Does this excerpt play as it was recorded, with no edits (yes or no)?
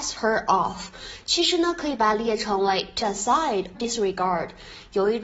no